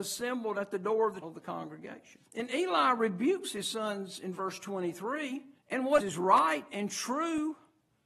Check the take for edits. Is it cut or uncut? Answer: cut